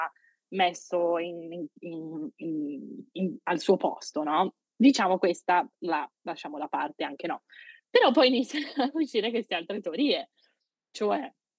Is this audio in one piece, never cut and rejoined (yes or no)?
yes